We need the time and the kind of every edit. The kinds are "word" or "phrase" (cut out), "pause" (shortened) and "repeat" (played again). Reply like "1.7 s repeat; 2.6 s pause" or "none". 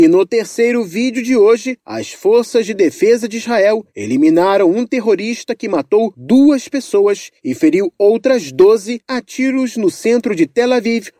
none

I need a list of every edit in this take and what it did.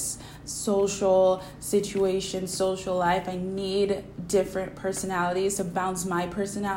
none

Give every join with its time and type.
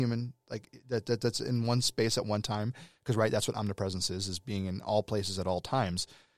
none

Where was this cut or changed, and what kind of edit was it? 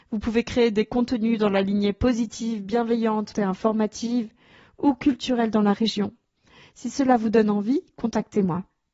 3.3 s word

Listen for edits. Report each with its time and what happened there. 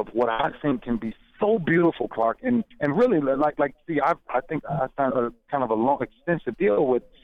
2.7 s pause; 4.6 s word; 5.1 s word

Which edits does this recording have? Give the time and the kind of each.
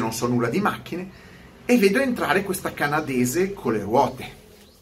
none

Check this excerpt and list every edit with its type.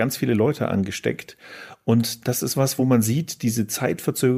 none

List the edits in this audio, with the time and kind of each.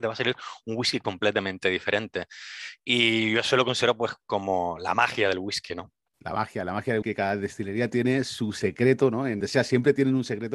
6.1 s pause; 7.0 s word; 9.4 s phrase

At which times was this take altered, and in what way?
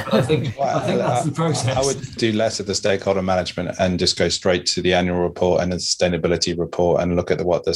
none

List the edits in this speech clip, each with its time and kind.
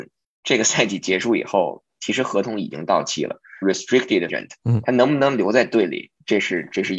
3.6 s phrase; 4.3 s word

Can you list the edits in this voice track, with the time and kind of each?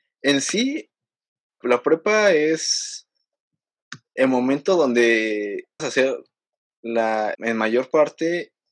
1.6 s word; 5.8 s word; 7.3 s word

